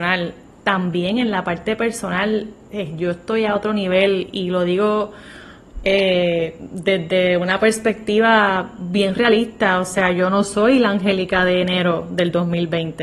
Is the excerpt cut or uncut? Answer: uncut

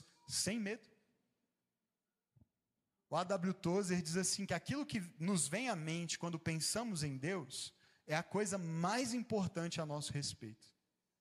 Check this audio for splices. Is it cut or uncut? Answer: uncut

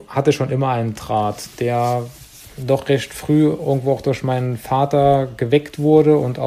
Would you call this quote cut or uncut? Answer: uncut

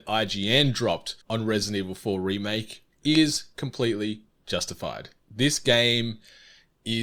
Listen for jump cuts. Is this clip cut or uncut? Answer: cut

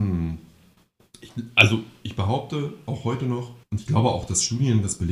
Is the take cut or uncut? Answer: cut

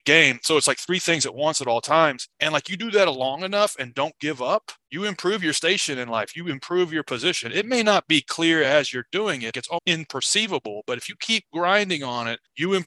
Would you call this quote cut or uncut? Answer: uncut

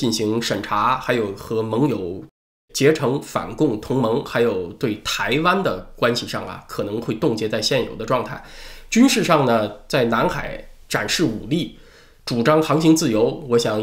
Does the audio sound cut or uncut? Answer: uncut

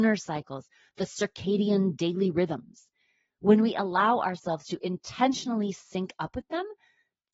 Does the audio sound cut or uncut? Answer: uncut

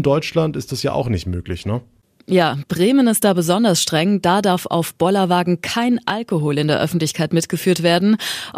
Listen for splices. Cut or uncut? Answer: uncut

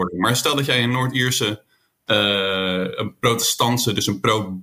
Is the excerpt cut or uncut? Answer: uncut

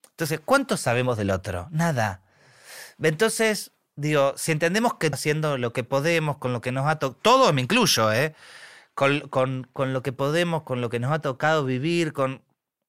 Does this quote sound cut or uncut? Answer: cut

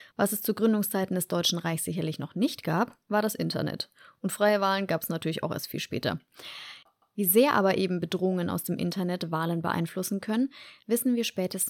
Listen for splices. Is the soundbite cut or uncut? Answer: uncut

